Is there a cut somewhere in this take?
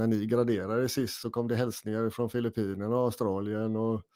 no; 0 cuts

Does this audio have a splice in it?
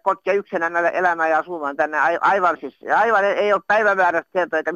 no; 0 cuts

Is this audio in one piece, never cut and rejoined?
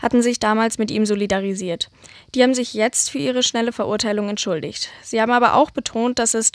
yes; 0 cuts

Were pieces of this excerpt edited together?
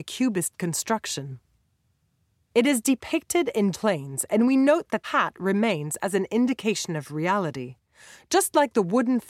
yes; 2 cuts; at 3.7 s, 5.0 s

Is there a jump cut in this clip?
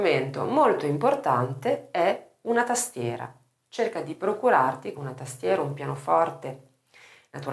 yes; 1 cut; at 5.0 s

